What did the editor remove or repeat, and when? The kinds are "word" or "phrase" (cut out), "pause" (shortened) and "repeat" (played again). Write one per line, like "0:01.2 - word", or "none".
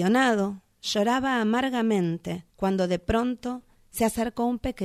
0:02.5 - pause